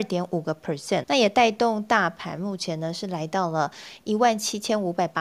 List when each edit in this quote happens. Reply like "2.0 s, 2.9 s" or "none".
1.0 s